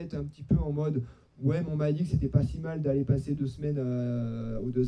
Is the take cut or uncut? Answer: uncut